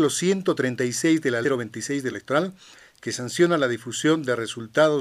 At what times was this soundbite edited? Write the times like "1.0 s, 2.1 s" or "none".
1.4 s, 2.1 s